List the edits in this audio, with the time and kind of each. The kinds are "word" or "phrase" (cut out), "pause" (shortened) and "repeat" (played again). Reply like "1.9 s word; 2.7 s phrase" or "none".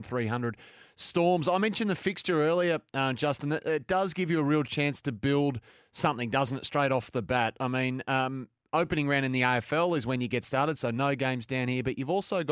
none